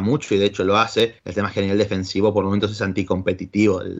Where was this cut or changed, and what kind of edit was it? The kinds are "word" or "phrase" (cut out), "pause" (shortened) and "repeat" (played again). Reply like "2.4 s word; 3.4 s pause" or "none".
1.2 s pause